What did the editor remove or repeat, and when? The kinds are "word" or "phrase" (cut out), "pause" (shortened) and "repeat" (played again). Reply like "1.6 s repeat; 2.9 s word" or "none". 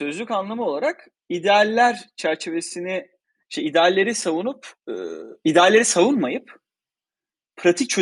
1.2 s pause; 3.2 s pause; 4.8 s pause